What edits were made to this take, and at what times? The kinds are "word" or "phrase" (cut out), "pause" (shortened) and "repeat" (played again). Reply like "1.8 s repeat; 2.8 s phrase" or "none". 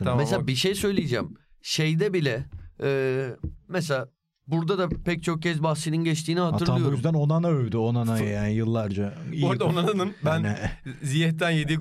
none